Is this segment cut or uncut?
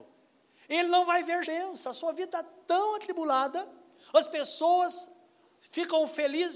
cut